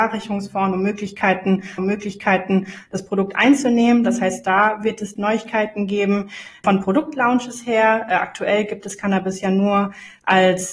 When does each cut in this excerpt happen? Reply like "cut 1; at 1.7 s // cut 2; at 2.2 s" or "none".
cut 1; at 1.8 s // cut 2; at 5.2 s